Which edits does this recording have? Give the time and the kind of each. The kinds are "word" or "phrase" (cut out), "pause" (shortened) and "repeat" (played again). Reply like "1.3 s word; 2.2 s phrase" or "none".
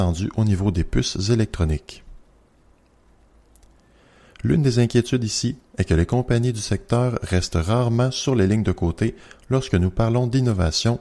none